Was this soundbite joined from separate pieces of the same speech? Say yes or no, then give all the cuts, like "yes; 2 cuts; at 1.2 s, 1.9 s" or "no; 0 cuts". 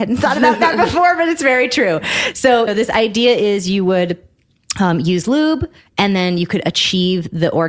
yes; 1 cut; at 2.7 s